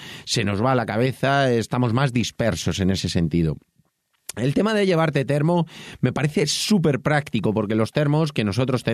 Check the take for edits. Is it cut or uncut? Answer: uncut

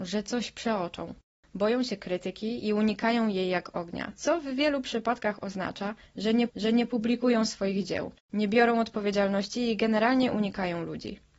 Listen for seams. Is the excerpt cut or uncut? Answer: cut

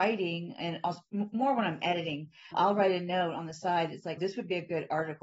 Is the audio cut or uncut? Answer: cut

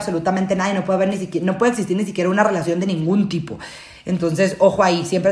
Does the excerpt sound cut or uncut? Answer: uncut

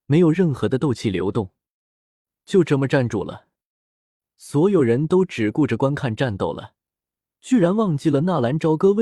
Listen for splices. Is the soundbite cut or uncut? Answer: uncut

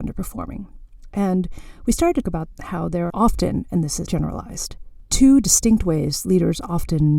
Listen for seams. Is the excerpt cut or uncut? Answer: cut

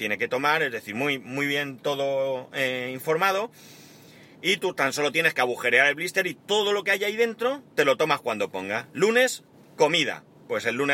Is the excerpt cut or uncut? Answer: uncut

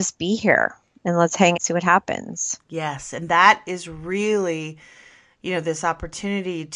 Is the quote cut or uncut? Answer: cut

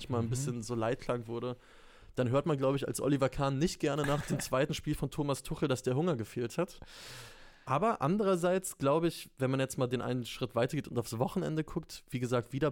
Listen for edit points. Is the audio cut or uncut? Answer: uncut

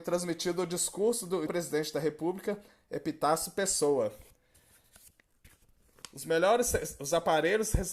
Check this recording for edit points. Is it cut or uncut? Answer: cut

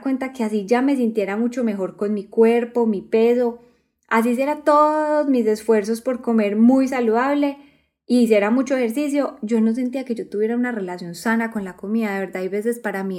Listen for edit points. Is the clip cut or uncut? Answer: uncut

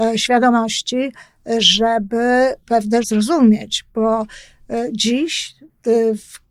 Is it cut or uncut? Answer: cut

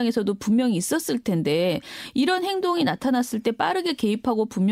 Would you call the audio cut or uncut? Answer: uncut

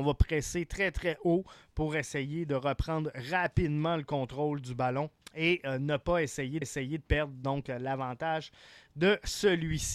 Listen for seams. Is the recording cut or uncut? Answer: cut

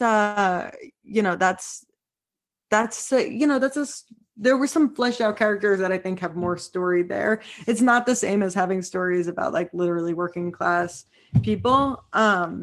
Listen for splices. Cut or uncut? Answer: uncut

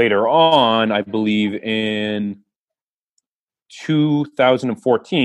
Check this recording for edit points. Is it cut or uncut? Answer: uncut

